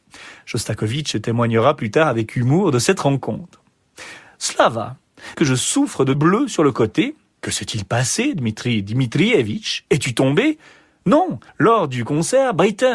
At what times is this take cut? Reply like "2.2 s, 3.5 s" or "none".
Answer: 5.3 s, 6.1 s, 7.4 s, 11.5 s